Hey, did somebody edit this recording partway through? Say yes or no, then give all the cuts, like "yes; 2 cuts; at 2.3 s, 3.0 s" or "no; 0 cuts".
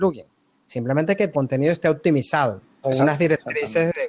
yes; 2 cuts; at 1.3 s, 2.8 s